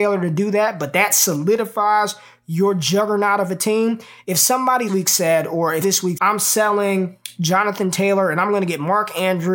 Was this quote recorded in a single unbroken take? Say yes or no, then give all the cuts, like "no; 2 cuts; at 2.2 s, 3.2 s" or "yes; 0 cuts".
no; 3 cuts; at 4.9 s, 5.8 s, 6.1 s